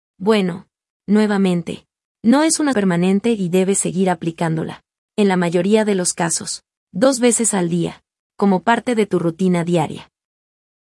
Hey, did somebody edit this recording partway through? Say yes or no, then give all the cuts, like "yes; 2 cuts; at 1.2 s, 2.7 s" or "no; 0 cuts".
yes; 1 cut; at 2.7 s